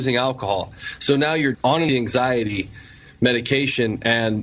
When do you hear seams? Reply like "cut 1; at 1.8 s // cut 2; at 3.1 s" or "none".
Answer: cut 1; at 1.5 s // cut 2; at 1.9 s